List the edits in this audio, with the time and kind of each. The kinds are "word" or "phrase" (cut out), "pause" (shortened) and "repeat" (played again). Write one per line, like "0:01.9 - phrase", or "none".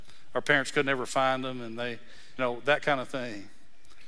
0:02.4 - word